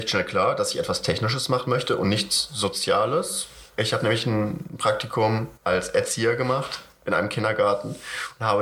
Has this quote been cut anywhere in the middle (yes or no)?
yes